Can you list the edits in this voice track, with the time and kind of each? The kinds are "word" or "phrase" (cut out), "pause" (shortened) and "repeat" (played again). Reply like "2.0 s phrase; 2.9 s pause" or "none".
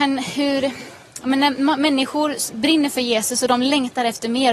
none